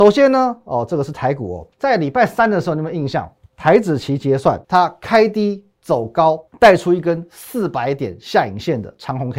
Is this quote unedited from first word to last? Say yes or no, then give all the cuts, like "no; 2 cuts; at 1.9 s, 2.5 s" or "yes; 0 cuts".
no; 3 cuts; at 1.7 s, 4.6 s, 6.5 s